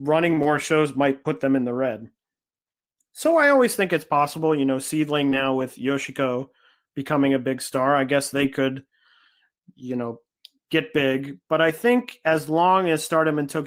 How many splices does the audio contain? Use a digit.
0